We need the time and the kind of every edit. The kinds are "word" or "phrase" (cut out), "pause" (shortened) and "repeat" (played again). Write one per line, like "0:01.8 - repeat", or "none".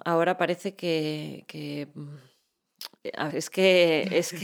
0:03.3 - word